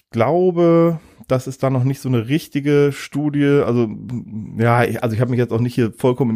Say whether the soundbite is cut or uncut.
uncut